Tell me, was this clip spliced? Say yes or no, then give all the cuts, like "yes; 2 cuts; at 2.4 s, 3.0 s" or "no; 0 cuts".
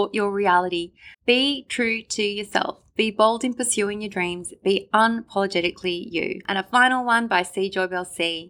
yes; 1 cut; at 1.1 s